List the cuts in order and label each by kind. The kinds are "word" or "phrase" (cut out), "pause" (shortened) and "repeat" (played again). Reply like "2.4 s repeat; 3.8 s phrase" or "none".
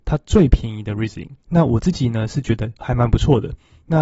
1.4 s pause; 2.8 s word